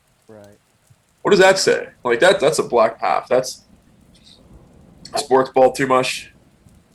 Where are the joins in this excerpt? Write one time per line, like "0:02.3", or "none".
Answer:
0:02.0
0:02.4
0:03.0
0:05.2